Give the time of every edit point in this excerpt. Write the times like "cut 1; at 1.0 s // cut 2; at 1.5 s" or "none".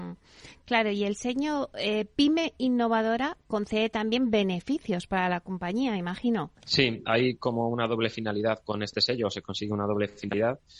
cut 1; at 6.5 s